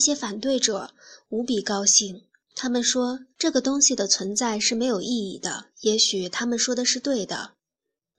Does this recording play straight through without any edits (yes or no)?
no